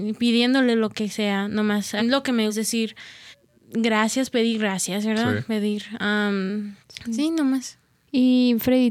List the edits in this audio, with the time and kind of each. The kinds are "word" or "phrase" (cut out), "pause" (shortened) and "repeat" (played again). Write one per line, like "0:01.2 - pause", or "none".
0:02.0 - word
0:02.5 - word
0:03.3 - pause
0:06.8 - pause